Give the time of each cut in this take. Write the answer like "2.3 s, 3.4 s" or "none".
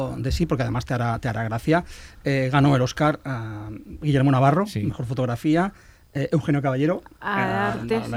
none

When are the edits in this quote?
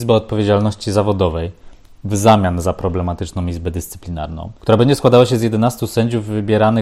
4.6 s

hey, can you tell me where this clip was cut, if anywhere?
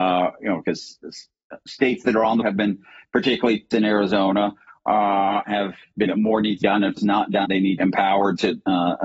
2.4 s, 3.7 s, 5.4 s, 6.1 s, 6.6 s, 7.0 s, 7.4 s, 7.8 s

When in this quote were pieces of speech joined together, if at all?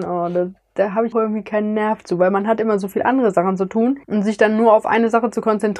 1.1 s, 4.0 s

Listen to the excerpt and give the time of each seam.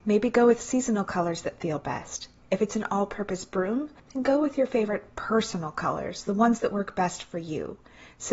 4.0 s

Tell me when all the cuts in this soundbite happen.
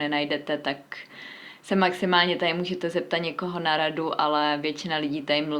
none

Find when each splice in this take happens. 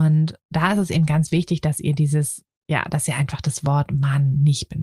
none

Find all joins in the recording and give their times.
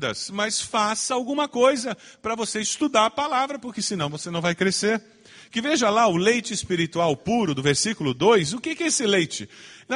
none

